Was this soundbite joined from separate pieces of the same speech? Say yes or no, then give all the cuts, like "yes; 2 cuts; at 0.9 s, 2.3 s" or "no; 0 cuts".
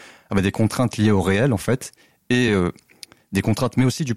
no; 0 cuts